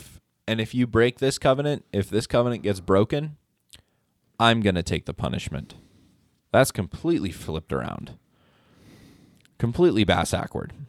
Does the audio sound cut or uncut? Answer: uncut